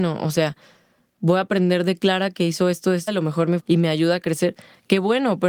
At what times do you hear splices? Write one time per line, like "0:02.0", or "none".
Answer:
0:03.1
0:03.6

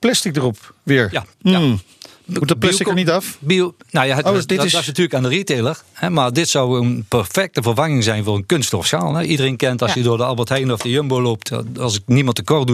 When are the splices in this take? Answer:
0:01.3

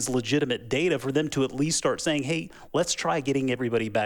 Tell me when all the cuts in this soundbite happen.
none

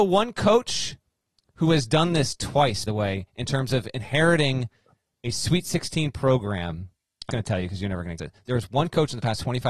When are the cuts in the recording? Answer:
0:02.9
0:07.3
0:08.2

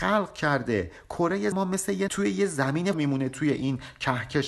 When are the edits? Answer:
0:01.5
0:02.1
0:02.9

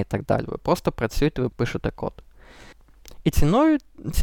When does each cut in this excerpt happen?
0:01.5

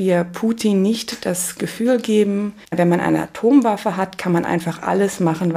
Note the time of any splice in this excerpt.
0:02.6

